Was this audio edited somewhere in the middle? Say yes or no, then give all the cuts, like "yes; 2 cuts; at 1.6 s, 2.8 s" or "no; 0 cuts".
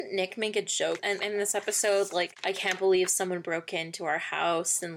yes; 1 cut; at 1.0 s